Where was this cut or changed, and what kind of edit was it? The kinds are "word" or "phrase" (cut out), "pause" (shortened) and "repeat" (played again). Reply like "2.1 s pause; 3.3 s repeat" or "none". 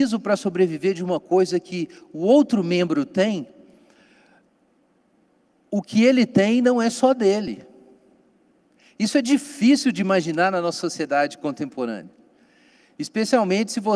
none